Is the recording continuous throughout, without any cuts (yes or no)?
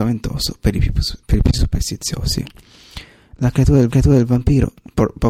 no